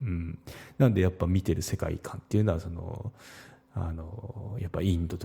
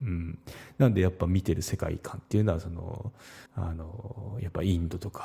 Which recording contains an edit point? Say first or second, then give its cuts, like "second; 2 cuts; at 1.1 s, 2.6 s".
second; 1 cut; at 3.5 s